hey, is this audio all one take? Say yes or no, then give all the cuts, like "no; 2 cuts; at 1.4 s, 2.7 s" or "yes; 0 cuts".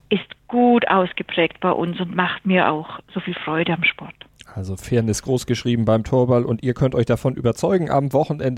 yes; 0 cuts